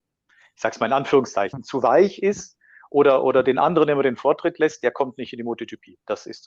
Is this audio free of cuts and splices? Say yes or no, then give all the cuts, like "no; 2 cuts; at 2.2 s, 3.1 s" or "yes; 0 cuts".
yes; 0 cuts